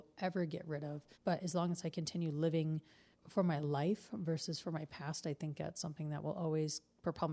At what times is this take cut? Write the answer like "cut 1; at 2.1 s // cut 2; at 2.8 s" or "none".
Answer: cut 1; at 1.1 s // cut 2; at 3.1 s